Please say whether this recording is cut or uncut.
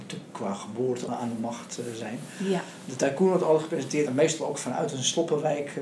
cut